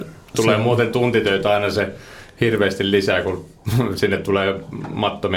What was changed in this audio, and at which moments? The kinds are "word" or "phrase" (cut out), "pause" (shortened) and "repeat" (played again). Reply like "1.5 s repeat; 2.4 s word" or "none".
none